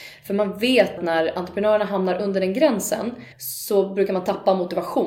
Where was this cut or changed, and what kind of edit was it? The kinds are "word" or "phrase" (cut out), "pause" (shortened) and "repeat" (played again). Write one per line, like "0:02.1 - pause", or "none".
0:01.0 - word
0:03.3 - pause

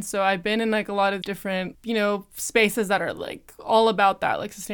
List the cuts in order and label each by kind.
0:01.2 - word
0:01.7 - word

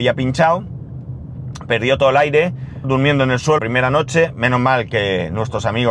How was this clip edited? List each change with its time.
0:02.8 - word
0:03.6 - word

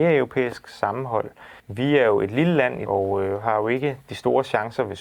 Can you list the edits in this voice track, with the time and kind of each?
0:01.6 - pause
0:02.9 - word

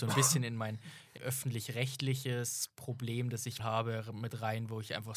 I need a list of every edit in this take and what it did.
0:01.2 - word
0:03.6 - word

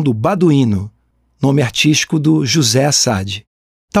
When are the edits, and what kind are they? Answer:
none

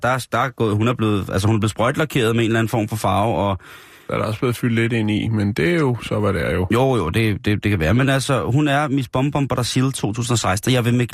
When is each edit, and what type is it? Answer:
none

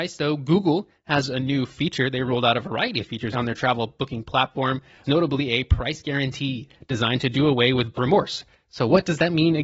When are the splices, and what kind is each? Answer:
0:03.3 - word
0:05.0 - word
0:07.9 - word

